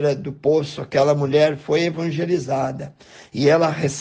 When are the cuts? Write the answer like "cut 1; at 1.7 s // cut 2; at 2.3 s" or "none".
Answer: none